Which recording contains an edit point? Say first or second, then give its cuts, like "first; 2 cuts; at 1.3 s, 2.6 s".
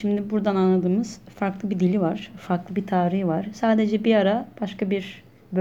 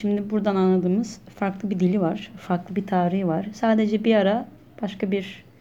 first; 1 cut; at 4.5 s